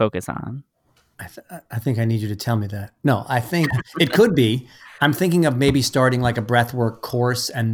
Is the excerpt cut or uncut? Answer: cut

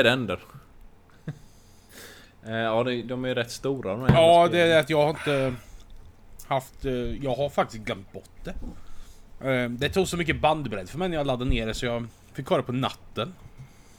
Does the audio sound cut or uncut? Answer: uncut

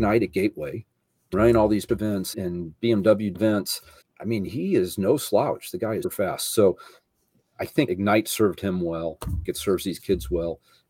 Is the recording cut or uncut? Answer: cut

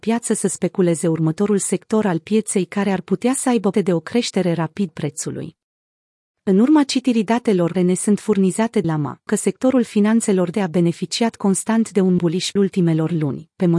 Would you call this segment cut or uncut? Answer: cut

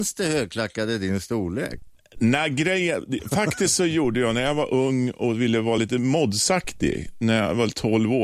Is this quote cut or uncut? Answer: uncut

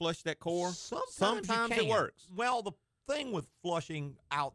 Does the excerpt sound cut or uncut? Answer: uncut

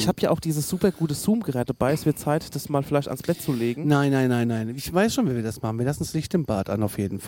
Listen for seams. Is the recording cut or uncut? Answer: uncut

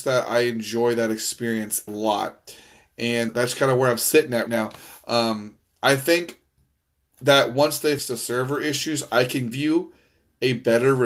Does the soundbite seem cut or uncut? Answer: cut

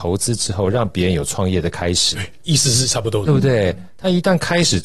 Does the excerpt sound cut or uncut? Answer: cut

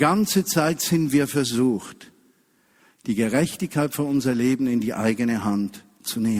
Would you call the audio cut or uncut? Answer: uncut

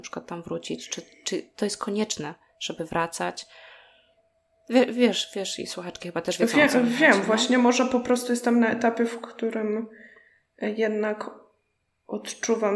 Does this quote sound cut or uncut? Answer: uncut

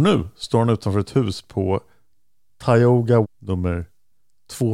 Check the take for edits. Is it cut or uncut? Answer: cut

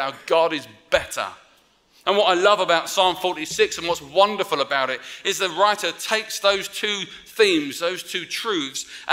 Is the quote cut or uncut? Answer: uncut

